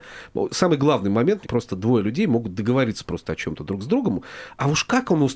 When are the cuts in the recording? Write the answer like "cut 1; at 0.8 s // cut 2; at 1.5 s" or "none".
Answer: cut 1; at 1.4 s